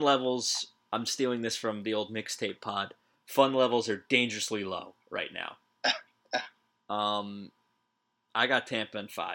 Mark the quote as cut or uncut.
uncut